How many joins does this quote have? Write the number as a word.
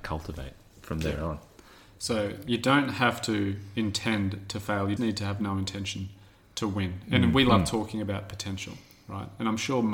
one